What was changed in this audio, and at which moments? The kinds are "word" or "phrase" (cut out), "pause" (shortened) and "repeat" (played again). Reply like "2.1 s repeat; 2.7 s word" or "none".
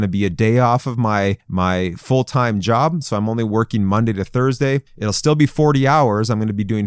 1.4 s pause; 4.9 s pause